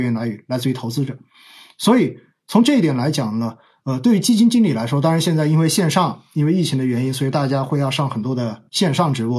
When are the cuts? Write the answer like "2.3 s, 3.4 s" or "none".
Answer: none